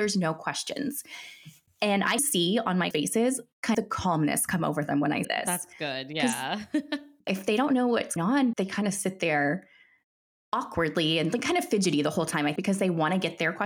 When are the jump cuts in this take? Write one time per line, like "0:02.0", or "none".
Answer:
0:02.2
0:02.9
0:03.7
0:05.2
0:07.3
0:08.2
0:08.5
0:12.6

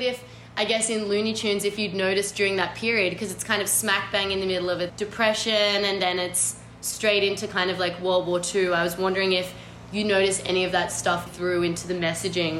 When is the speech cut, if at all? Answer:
0:04.9
0:11.3

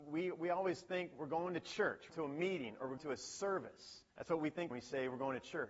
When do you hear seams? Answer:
0:02.1
0:03.0
0:04.1
0:04.7

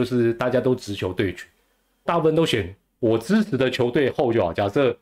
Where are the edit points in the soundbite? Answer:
0:02.1

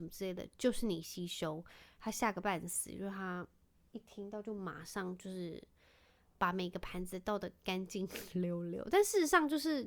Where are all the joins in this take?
none

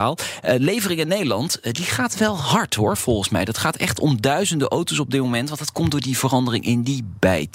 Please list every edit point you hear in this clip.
none

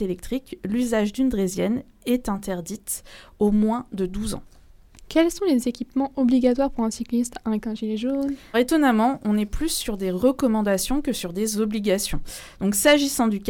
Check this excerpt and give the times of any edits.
0:07.6
0:08.5

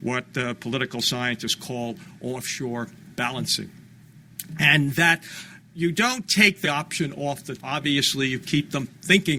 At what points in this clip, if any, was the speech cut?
0:05.6
0:06.6
0:07.6

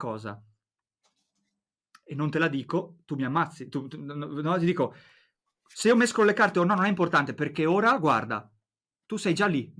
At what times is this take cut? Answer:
none

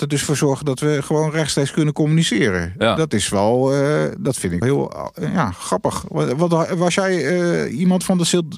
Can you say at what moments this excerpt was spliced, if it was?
0:04.6

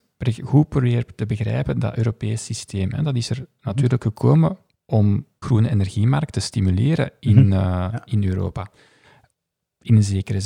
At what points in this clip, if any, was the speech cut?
0:05.4

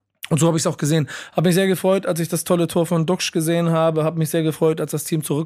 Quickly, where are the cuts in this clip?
none

